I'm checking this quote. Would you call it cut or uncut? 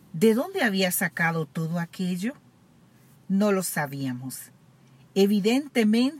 uncut